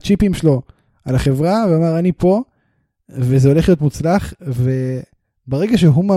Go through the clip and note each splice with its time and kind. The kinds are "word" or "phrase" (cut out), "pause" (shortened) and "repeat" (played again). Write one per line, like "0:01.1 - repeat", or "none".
none